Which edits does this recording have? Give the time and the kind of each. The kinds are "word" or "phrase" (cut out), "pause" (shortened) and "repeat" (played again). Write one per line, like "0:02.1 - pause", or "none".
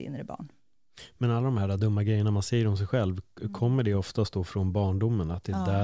none